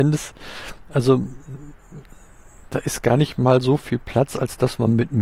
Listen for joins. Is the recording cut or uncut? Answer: uncut